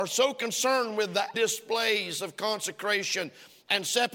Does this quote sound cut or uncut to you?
cut